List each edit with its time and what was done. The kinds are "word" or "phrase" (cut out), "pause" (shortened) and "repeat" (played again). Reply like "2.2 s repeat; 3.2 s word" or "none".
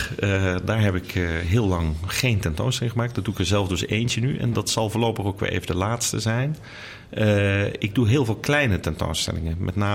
none

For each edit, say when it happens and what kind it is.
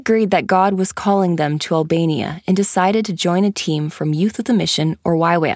none

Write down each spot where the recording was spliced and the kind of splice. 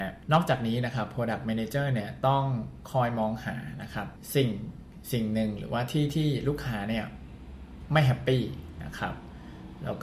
none

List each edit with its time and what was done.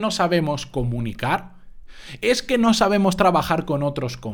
none

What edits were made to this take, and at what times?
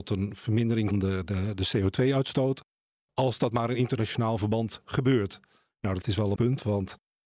0.9 s word; 6.0 s word; 6.4 s word

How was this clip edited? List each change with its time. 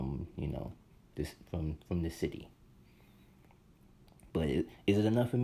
0.9 s pause

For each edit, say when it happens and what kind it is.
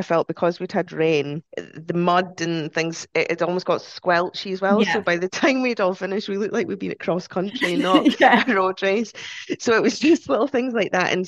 1.5 s pause

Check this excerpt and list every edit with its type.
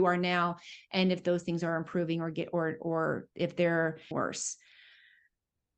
3.3 s pause; 4.1 s word

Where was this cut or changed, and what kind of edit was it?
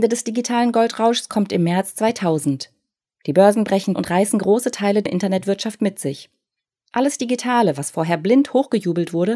3.9 s word; 5.1 s word

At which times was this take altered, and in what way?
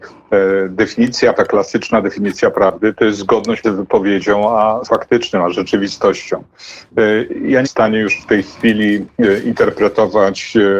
1.3 s word; 3.6 s word; 4.8 s word; 7.6 s word

